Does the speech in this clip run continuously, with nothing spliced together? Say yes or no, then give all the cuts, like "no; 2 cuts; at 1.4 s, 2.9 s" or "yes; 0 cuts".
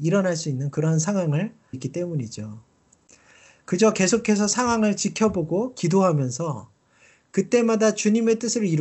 no; 1 cut; at 1.7 s